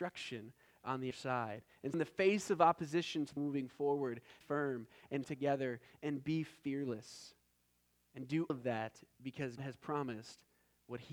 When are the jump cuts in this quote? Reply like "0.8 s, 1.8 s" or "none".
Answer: 1.1 s, 1.9 s, 3.4 s, 4.4 s, 5.2 s, 8.5 s, 9.6 s